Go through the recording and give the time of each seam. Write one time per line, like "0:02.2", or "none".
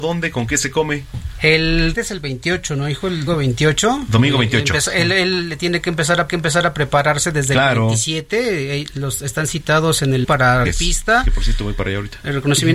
0:01.9
0:03.3
0:06.3
0:10.2
0:10.6